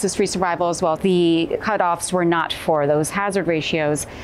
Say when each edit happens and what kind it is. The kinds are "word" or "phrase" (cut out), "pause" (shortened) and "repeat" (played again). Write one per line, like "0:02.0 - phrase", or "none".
0:00.9 - phrase
0:02.5 - word